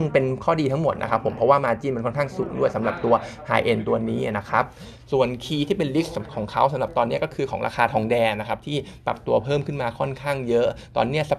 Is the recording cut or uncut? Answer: uncut